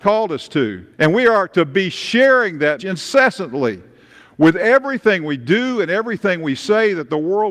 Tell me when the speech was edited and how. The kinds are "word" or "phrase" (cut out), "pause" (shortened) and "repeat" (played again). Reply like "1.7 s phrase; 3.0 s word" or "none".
0.9 s pause; 2.8 s word